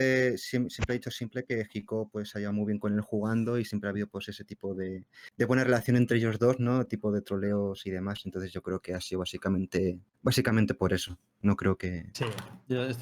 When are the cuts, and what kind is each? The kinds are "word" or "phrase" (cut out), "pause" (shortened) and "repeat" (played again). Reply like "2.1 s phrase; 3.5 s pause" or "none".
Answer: 5.3 s pause; 10.1 s pause